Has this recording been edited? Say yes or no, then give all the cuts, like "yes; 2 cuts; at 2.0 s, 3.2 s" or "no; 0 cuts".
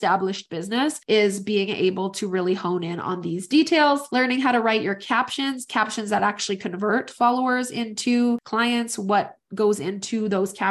no; 0 cuts